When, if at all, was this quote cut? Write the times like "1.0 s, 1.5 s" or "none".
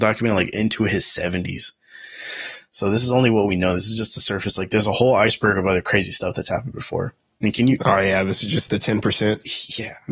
8.7 s